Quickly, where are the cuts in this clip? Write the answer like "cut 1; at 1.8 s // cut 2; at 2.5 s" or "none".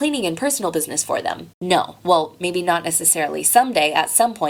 cut 1; at 1.5 s